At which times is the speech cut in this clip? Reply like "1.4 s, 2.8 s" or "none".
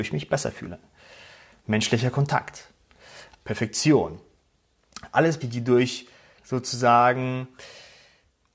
3.4 s, 5.4 s, 6.4 s